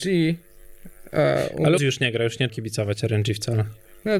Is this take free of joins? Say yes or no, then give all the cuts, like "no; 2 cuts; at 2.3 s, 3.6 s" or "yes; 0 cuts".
no; 2 cuts; at 1.8 s, 2.5 s